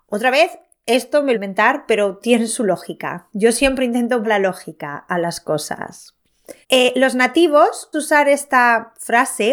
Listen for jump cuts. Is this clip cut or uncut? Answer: cut